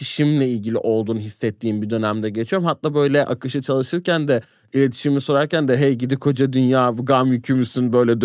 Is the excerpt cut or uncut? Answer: uncut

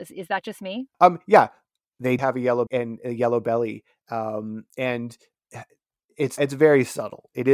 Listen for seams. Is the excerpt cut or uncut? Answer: cut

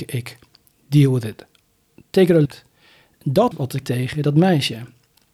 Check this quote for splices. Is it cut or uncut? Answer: cut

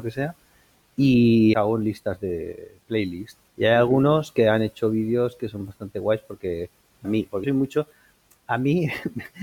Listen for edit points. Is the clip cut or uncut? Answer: cut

